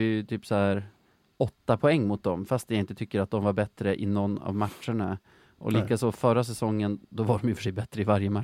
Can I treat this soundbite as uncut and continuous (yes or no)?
yes